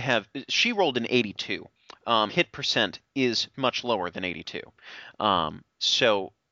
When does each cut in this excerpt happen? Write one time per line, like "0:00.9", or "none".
0:02.3
0:03.5